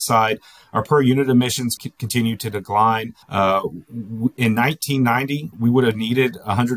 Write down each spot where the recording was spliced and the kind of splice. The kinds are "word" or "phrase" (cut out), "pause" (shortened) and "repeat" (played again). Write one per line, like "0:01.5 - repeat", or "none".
0:01.8 - word
0:03.2 - pause
0:05.5 - word